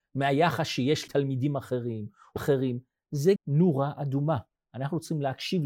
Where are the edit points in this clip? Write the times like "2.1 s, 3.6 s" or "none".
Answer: 1.1 s, 2.4 s, 3.4 s